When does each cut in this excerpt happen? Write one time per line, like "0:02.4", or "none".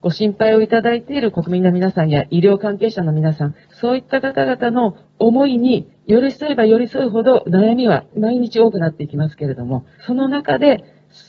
0:03.6
0:09.9